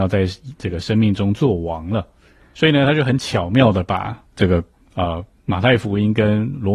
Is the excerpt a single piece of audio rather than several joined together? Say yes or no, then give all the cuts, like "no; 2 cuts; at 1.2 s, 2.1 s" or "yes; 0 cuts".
yes; 0 cuts